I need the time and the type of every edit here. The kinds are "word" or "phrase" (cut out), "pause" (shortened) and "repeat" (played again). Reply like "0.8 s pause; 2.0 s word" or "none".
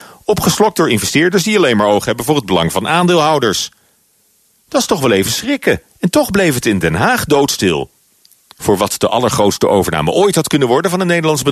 5.9 s pause